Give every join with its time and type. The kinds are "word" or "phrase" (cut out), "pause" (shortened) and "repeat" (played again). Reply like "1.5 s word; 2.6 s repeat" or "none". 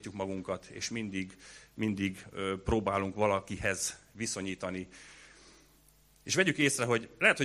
none